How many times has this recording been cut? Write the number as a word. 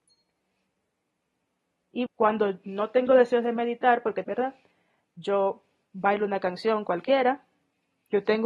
two